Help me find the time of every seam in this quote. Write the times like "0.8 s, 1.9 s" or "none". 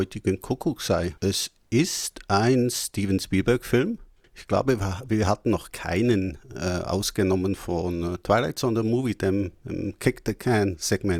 1.2 s, 4.2 s